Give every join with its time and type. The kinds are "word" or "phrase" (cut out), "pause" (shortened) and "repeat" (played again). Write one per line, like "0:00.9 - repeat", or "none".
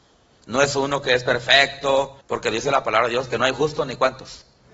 0:02.2 - pause